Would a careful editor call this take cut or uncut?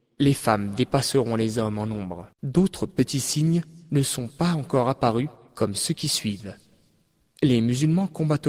cut